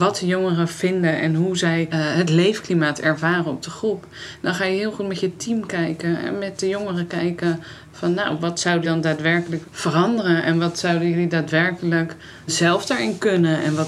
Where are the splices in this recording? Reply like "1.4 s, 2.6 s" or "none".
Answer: 1.9 s, 8.8 s, 9.6 s, 12.5 s

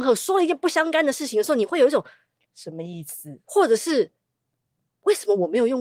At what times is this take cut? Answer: none

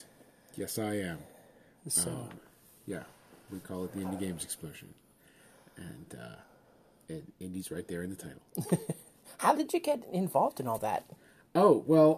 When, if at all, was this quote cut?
none

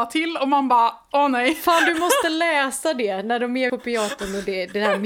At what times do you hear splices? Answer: 3.7 s

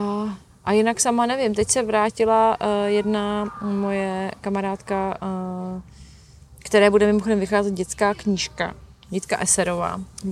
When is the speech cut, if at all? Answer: none

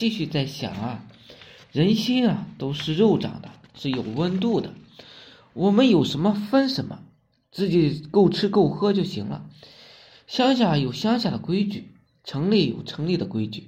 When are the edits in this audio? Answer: none

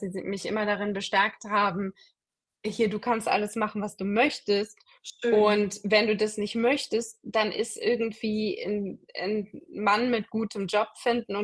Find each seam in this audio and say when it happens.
none

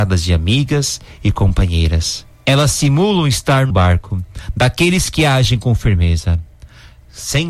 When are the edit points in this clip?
2.3 s, 3.7 s

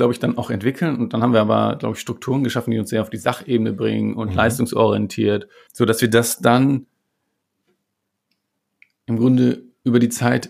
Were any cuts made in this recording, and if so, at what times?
5.7 s

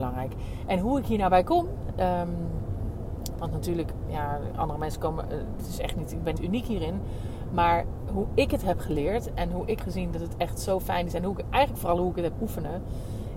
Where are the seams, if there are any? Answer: 6.4 s, 9.8 s, 12.3 s

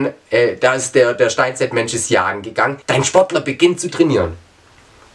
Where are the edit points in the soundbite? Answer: 2.8 s

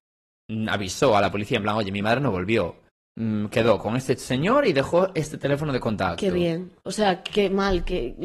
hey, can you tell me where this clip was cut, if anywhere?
6.8 s

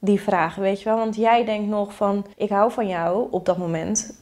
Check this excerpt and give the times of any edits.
2.3 s

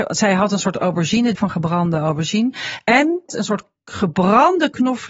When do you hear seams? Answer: 1.3 s, 3.3 s

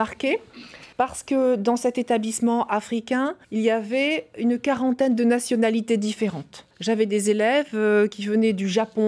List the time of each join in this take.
0.9 s, 3.4 s, 6.7 s

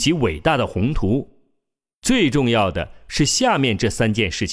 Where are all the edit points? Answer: none

